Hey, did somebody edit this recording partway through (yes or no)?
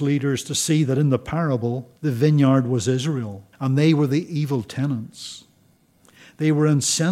yes